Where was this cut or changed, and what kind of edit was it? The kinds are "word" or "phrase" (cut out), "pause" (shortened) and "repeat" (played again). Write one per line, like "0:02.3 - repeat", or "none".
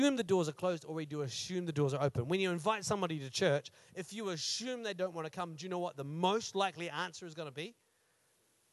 none